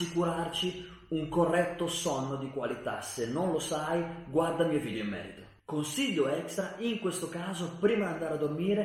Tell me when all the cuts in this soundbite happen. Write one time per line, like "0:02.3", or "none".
none